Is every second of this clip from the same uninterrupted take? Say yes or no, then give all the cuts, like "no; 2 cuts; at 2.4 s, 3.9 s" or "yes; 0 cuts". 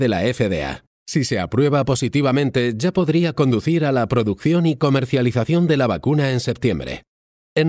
yes; 0 cuts